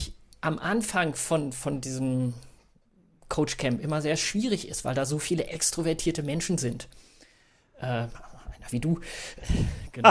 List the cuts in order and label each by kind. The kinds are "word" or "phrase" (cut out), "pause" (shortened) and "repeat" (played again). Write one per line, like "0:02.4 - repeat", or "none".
none